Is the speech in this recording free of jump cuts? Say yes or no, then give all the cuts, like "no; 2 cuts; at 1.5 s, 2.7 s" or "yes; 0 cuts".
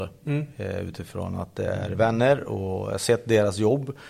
yes; 0 cuts